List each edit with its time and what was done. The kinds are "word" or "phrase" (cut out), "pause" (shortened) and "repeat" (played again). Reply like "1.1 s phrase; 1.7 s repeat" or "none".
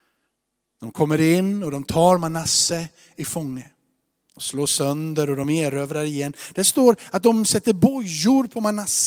none